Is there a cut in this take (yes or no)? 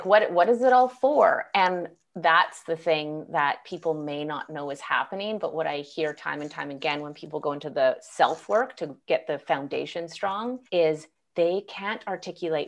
yes